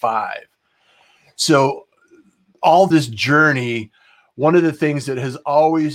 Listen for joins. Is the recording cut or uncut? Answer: cut